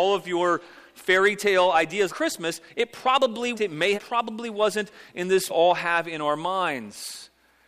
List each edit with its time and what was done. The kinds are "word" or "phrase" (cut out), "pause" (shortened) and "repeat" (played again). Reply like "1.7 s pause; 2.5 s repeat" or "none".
2.1 s word; 3.5 s word; 3.9 s phrase; 5.5 s phrase